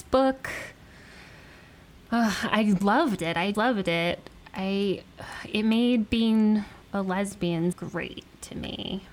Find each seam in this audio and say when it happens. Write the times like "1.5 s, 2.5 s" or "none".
3.5 s, 6.8 s, 7.7 s